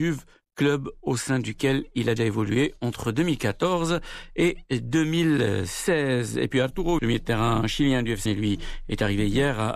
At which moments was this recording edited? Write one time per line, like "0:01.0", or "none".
0:02.2
0:07.0
0:08.3